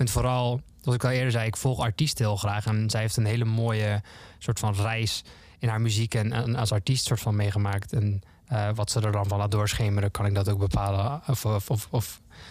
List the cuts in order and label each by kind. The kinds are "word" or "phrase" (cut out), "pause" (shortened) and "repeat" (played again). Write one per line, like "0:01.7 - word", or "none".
none

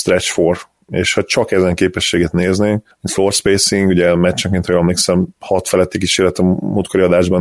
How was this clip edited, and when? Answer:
0:01.2 - word

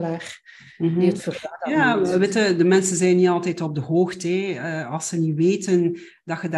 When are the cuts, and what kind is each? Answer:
none

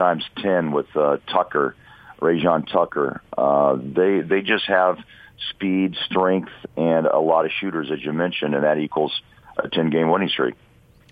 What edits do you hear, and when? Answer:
none

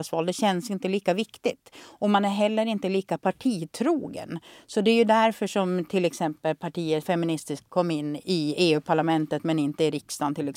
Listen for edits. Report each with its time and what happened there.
0:07.0 - word
0:07.7 - word

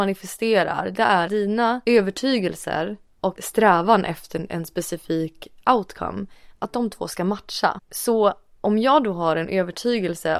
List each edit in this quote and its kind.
0:01.3 - word
0:03.3 - word

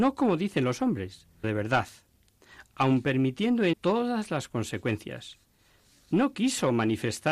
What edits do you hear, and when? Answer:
0:01.4 - word
0:03.7 - word

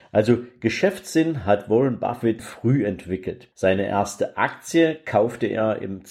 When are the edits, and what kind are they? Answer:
0:02.4 - word
0:03.5 - pause

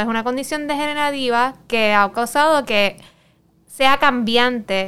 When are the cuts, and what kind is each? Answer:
none

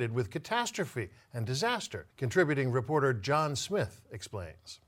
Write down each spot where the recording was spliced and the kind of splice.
0:02.1 - pause

